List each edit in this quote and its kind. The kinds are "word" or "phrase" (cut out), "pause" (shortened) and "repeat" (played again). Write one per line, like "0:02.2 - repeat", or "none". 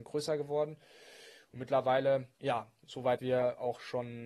0:02.3 - pause
0:03.2 - word